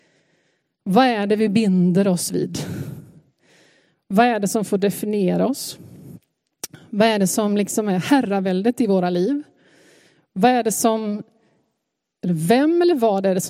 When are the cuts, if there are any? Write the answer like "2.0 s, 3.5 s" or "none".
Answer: none